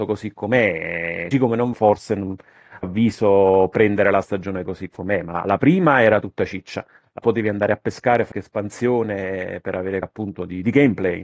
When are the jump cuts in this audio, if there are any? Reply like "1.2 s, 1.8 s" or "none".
1.3 s, 1.7 s, 2.8 s, 4.2 s, 4.6 s, 5.4 s, 7.2 s, 8.3 s, 10.0 s